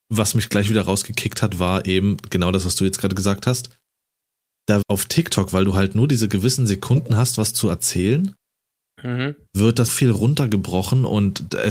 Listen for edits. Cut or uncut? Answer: cut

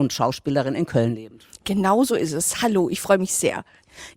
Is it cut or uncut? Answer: uncut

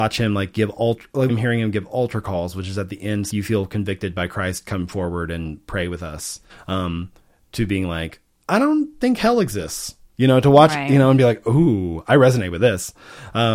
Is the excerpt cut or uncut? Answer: cut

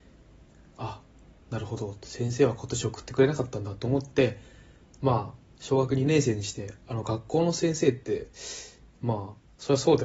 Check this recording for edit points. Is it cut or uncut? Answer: uncut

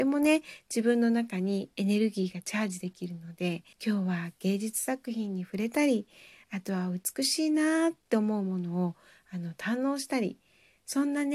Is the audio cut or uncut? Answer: cut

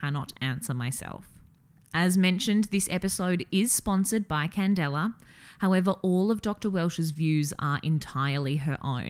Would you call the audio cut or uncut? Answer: uncut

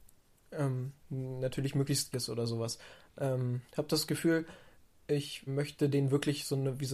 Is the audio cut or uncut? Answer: cut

